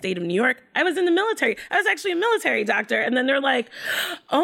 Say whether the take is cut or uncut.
uncut